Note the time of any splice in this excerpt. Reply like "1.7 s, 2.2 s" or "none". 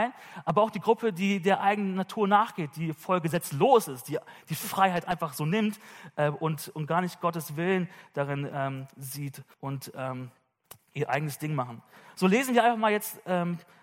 9.5 s